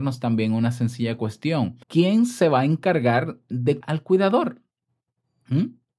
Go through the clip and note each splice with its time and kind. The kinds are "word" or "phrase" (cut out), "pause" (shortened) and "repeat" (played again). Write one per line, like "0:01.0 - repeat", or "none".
0:01.8 - pause
0:03.8 - word